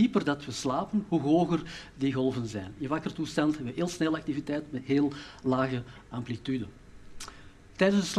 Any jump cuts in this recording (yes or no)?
no